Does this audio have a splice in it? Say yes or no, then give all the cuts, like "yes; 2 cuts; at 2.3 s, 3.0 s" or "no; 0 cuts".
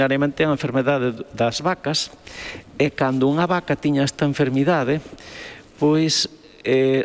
no; 0 cuts